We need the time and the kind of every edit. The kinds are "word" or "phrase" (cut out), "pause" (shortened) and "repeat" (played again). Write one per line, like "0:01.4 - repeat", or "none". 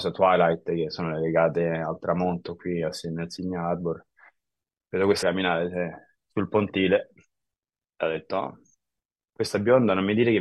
0:05.2 - word